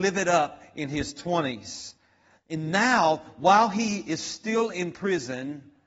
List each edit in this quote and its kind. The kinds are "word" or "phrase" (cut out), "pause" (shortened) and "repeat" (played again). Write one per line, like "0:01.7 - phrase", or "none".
none

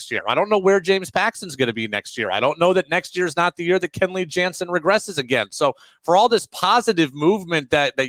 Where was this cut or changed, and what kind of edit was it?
none

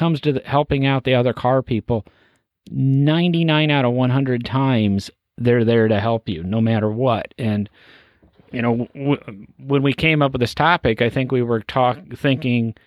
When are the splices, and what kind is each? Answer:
none

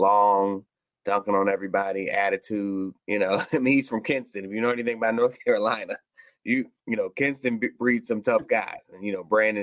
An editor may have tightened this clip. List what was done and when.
0:03.0 - pause
0:06.8 - pause

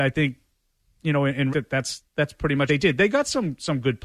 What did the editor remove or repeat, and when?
0:01.5 - word
0:02.7 - word

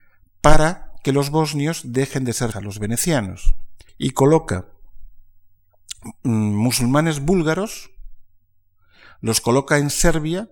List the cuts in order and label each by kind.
0:02.5 - word
0:03.9 - pause

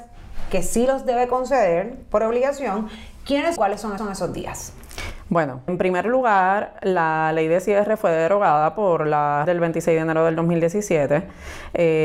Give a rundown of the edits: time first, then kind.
0:03.6 - phrase
0:04.0 - repeat
0:05.7 - word
0:09.5 - phrase

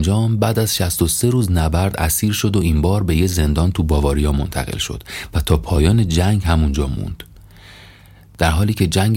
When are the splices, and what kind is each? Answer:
none

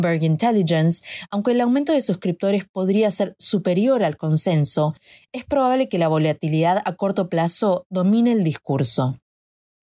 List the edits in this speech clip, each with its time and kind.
none

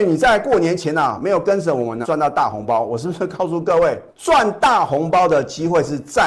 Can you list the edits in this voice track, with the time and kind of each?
0:02.0 - word
0:04.1 - pause

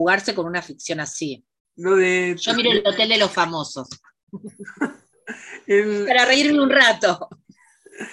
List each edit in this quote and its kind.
0:01.6 - pause

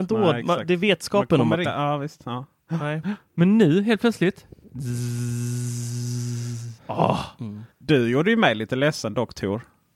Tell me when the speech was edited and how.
0:01.6 - word
0:06.8 - pause
0:07.7 - pause

